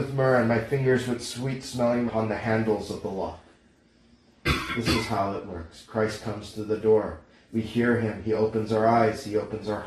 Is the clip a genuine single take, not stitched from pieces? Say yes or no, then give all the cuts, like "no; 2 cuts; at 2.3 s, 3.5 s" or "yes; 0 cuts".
no; 1 cut; at 2.1 s